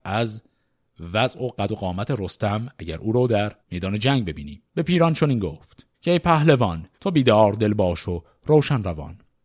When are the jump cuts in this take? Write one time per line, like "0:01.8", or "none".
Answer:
0:03.6
0:04.7
0:05.9
0:06.9